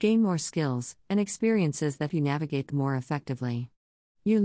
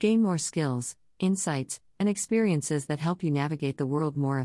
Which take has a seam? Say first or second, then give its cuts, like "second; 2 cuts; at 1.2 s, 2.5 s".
first; 3 cuts; at 1.0 s, 2.1 s, 2.7 s